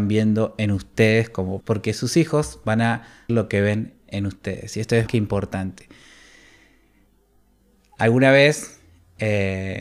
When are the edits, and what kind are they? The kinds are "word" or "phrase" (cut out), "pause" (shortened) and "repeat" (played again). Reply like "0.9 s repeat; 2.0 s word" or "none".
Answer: 1.6 s word; 3.3 s word; 5.1 s word